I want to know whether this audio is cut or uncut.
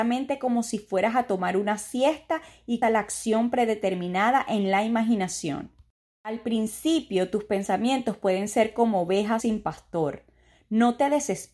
cut